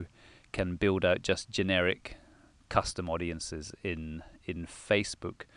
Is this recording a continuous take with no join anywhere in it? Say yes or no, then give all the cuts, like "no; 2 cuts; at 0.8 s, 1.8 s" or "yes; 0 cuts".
yes; 0 cuts